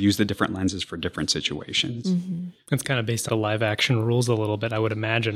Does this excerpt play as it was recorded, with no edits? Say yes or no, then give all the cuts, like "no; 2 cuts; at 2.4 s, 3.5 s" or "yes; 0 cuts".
no; 1 cut; at 3.3 s